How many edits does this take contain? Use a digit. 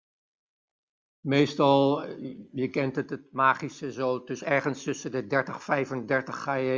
0